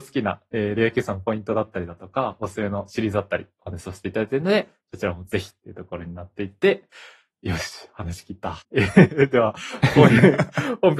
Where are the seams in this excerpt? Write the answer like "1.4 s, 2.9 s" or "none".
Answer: 8.6 s